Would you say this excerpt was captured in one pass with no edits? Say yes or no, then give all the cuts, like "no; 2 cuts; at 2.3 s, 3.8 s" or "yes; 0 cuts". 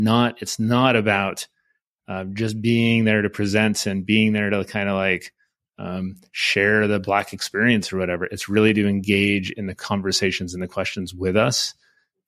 yes; 0 cuts